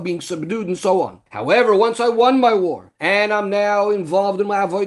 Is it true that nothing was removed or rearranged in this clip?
no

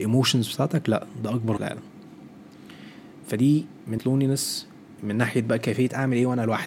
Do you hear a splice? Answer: yes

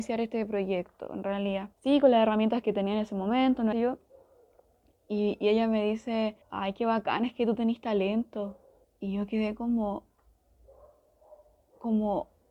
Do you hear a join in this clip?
yes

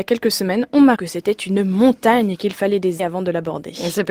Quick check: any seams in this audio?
yes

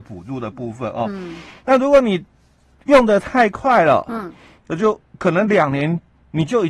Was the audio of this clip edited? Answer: no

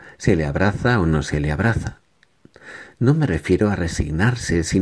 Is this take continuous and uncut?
yes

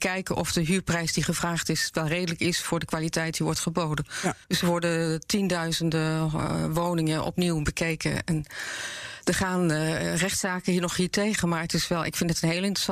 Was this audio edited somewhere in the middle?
yes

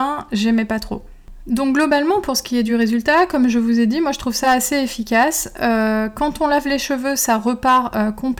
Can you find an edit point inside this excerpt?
no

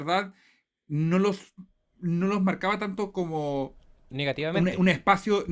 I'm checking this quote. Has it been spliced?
no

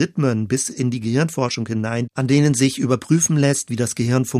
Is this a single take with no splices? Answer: yes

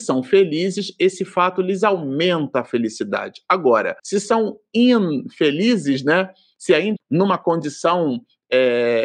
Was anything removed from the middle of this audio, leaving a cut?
yes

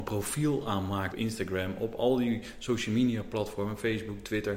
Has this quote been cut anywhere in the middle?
yes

